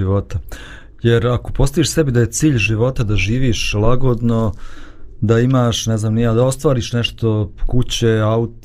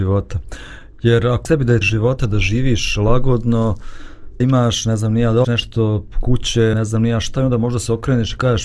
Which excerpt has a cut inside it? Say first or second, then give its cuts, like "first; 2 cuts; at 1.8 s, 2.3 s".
second; 5 cuts; at 1.4 s, 1.8 s, 4.4 s, 5.4 s, 6.7 s